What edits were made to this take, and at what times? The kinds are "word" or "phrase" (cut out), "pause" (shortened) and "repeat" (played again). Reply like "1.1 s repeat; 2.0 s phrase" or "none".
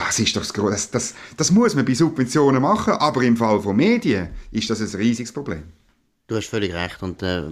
none